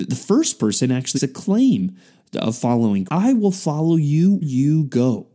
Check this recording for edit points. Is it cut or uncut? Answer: cut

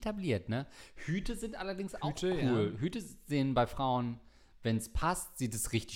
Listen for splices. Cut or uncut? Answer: uncut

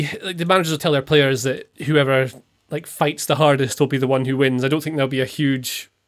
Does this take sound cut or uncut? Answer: cut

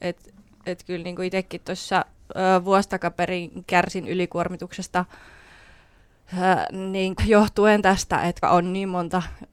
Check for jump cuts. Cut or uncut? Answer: cut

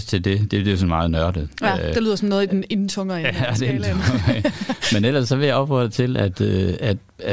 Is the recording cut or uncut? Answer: uncut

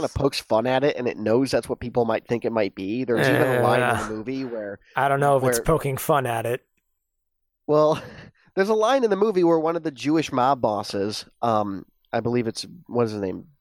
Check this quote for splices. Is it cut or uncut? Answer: uncut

